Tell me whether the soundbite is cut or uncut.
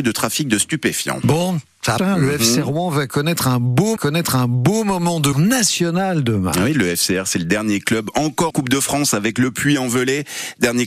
cut